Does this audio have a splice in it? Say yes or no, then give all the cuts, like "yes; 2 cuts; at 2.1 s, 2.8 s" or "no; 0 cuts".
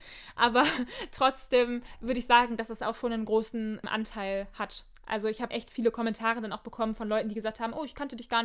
yes; 1 cut; at 5.5 s